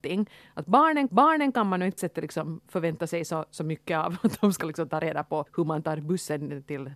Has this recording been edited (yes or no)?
yes